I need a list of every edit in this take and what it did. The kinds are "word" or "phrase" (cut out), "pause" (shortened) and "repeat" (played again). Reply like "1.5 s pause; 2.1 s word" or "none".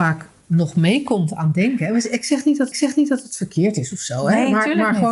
2.7 s repeat

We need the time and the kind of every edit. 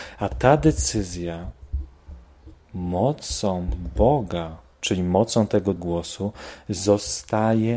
5.8 s word

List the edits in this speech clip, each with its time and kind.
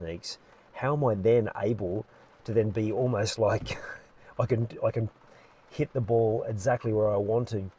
none

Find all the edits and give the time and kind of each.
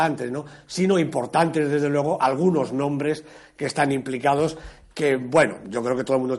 none

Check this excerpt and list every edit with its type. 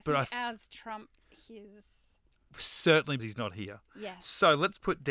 3.2 s word

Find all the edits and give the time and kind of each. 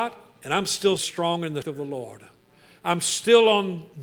1.0 s word; 1.6 s word

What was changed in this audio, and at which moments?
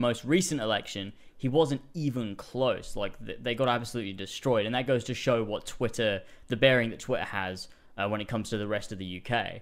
none

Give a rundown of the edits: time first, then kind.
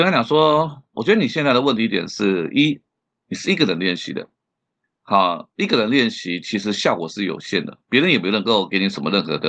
none

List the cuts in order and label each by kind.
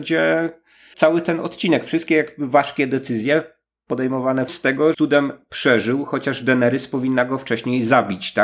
0.9 s word; 4.5 s phrase; 4.9 s phrase

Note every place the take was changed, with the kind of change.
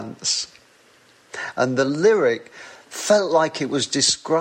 none

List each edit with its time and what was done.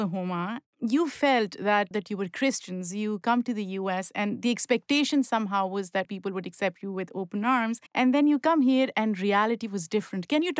1.9 s word; 6.0 s word; 7.9 s pause

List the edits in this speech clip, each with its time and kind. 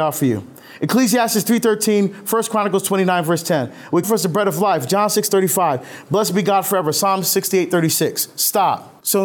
4.0 s word

